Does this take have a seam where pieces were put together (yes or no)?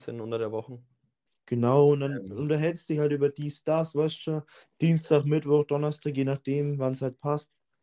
no